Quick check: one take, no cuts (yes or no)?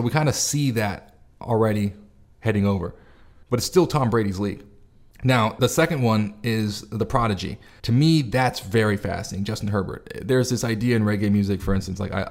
yes